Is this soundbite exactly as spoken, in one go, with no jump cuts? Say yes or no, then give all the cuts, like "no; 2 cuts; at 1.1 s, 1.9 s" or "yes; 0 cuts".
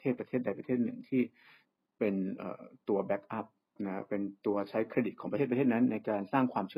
yes; 0 cuts